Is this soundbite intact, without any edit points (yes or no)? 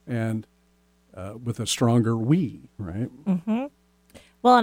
yes